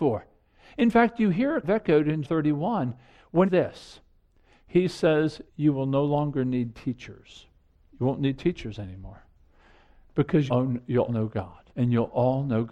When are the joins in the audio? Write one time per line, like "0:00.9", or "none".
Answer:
0:01.6
0:02.2
0:03.5
0:05.5
0:07.7
0:10.5
0:11.1
0:11.7